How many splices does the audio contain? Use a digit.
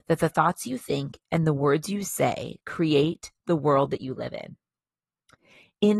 0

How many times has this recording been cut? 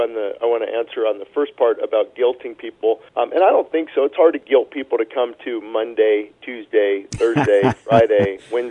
1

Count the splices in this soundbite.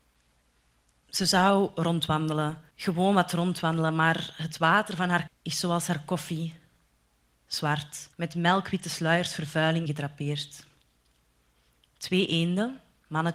4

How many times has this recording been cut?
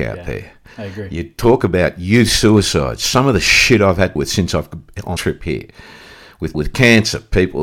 3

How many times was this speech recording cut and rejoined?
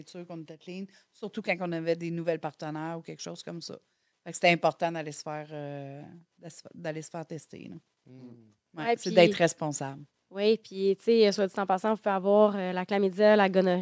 0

